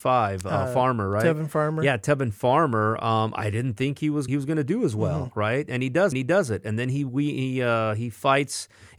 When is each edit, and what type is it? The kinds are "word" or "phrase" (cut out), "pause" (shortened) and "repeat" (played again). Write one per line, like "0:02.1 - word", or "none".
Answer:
0:04.3 - phrase
0:06.1 - repeat